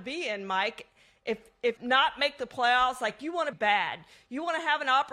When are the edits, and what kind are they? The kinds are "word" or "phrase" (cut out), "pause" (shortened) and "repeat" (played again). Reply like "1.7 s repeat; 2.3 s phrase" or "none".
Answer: 1.8 s phrase; 3.5 s word